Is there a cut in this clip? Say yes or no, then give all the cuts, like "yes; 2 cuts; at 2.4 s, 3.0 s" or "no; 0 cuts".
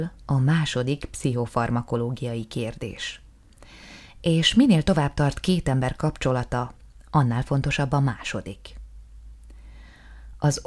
no; 0 cuts